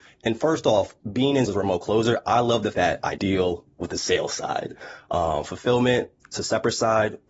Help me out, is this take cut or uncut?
cut